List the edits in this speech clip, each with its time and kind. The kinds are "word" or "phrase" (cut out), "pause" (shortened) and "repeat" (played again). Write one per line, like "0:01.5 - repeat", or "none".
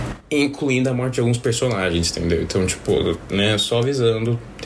none